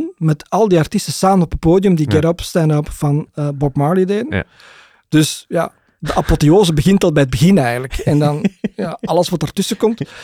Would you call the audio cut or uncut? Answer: uncut